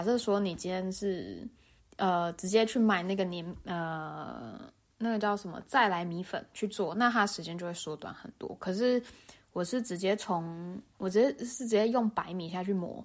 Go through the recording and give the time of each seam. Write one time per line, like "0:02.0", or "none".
0:01.8